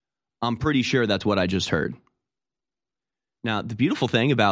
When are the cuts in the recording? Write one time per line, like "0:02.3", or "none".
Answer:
none